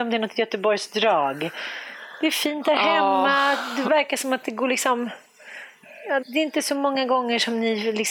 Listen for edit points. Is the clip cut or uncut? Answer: cut